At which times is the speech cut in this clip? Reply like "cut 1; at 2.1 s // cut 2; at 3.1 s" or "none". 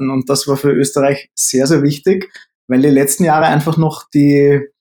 none